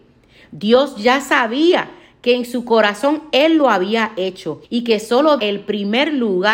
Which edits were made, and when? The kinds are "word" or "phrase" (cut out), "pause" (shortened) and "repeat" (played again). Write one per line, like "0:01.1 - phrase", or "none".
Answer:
0:04.6 - pause
0:05.4 - phrase